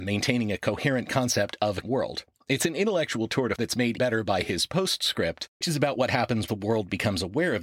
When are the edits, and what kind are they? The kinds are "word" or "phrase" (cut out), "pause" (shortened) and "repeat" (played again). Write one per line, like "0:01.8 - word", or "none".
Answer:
0:01.8 - word
0:03.6 - word
0:04.0 - word
0:05.6 - word
0:06.5 - word